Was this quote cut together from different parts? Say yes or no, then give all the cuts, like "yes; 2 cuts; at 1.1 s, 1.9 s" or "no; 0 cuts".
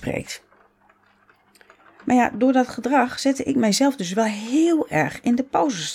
no; 0 cuts